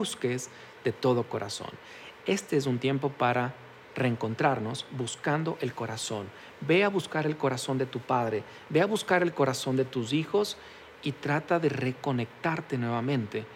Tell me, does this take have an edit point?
no; 0 cuts

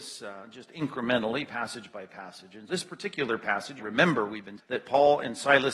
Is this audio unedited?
no; 3 cuts; at 2.7 s, 3.8 s, 4.6 s

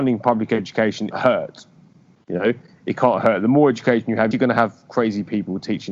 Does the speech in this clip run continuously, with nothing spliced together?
no; 2 cuts; at 1.1 s, 4.3 s

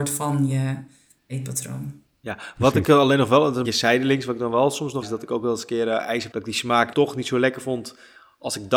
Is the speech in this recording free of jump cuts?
no; 4 cuts; at 3.6 s, 5.0 s, 6.3 s, 6.9 s

